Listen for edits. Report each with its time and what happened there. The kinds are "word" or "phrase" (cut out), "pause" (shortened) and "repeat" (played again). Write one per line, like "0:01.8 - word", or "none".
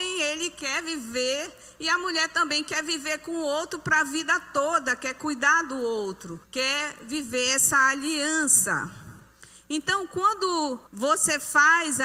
0:06.4 - pause
0:10.9 - pause